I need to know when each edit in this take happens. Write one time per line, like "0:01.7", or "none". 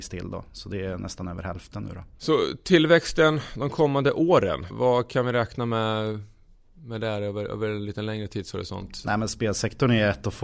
0:04.7

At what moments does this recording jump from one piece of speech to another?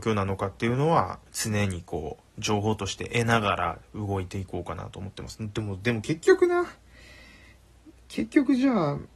0:01.3

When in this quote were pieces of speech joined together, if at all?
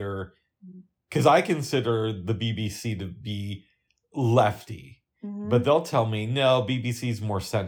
none

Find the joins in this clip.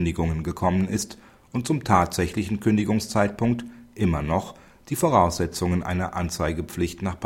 none

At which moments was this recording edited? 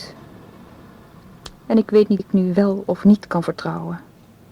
0:02.2

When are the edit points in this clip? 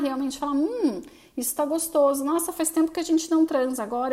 none

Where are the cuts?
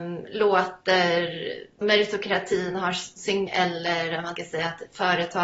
0:01.8
0:03.5
0:04.4

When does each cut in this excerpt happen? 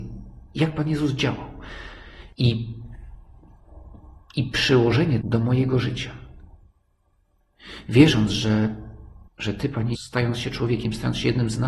0:02.3
0:05.2
0:09.3
0:09.9

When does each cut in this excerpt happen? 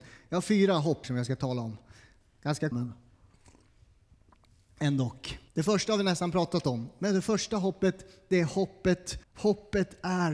0:01.0
0:02.7
0:05.5
0:09.2

